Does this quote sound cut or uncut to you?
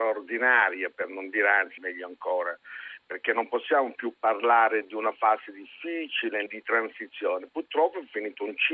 cut